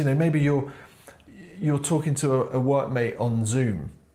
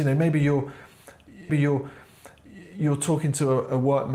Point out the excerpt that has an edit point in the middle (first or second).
second